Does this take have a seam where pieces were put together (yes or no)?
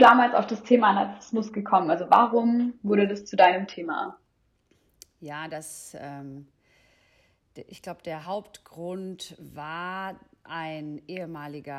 no